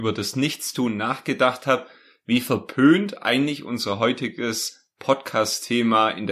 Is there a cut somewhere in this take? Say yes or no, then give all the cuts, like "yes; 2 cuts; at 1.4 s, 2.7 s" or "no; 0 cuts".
no; 0 cuts